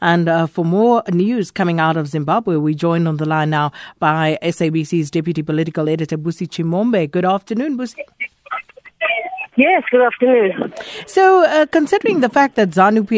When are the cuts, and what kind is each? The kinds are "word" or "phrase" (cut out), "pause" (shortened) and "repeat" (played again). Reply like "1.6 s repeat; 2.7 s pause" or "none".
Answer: none